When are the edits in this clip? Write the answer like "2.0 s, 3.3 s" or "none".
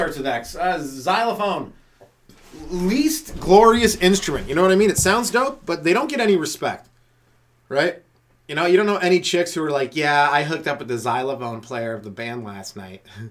none